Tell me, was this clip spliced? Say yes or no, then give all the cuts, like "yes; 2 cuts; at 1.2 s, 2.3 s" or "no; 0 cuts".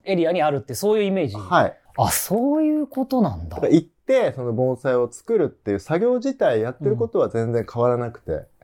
yes; 1 cut; at 1.9 s